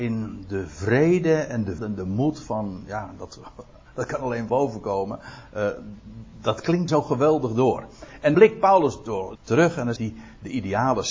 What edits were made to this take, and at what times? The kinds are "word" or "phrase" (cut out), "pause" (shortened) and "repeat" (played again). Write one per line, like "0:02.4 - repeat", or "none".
0:01.8 - word
0:04.5 - word
0:06.9 - word
0:08.3 - word
0:09.3 - word
0:10.0 - word